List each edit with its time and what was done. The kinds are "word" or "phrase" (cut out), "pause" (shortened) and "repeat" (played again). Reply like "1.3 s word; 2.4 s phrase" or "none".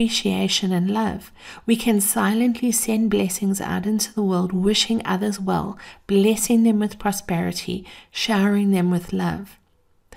none